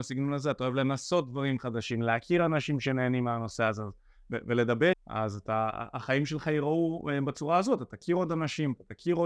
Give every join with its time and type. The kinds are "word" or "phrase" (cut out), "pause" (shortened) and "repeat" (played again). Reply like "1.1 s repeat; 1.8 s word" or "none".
4.9 s word

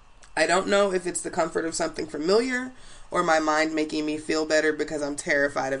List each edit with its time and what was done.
none

